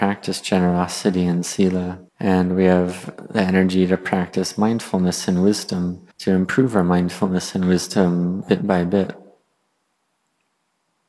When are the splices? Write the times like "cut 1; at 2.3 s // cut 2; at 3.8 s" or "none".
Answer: cut 1; at 2.1 s // cut 2; at 6.1 s